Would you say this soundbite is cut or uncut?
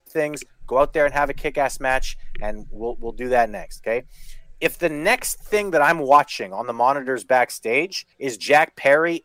cut